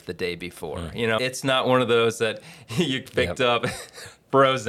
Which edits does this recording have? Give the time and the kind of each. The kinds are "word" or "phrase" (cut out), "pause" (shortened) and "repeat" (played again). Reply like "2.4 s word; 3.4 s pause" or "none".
1.2 s word